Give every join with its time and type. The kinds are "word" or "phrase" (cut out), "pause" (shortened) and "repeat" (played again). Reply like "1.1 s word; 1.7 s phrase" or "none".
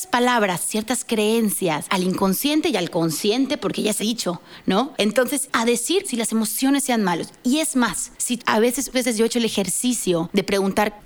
1.9 s word; 4.0 s word; 5.5 s word; 6.0 s word; 8.4 s word; 8.9 s word